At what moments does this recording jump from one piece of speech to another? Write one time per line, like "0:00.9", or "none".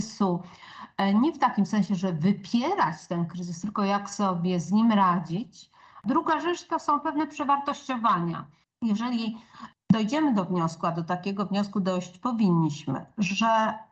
none